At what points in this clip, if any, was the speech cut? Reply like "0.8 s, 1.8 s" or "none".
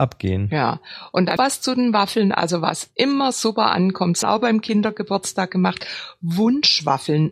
1.4 s, 4.2 s